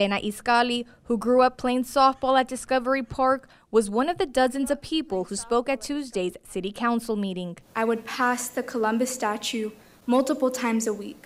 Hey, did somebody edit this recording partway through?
no; 0 cuts

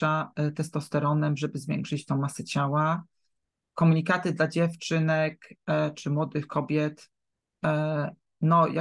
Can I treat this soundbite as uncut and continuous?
yes; 0 cuts

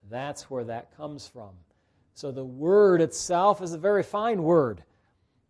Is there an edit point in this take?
no; 0 cuts

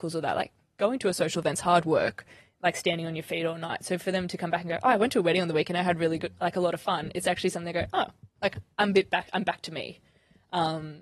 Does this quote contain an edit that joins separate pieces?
no; 0 cuts

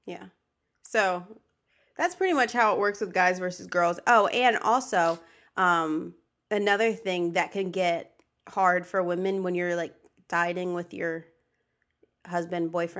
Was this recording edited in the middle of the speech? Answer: no; 0 cuts

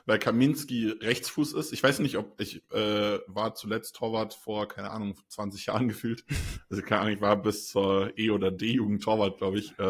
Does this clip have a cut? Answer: no; 0 cuts

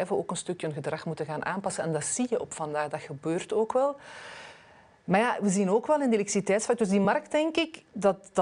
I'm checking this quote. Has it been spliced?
no; 0 cuts

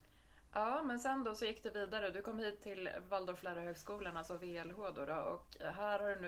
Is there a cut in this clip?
no; 0 cuts

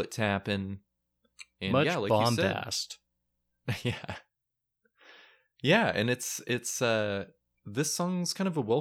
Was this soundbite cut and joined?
no; 0 cuts

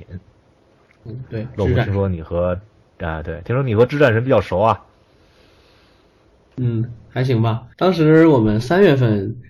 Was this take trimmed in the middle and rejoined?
yes; 1 cut; at 7.7 s

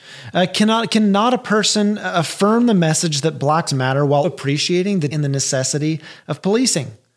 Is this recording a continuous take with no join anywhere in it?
no; 3 cuts; at 3.7 s, 4.2 s, 5.1 s

